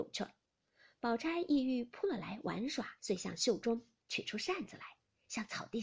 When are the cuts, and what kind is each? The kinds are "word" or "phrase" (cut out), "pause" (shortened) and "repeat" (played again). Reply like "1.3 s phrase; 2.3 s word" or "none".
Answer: 3.0 s pause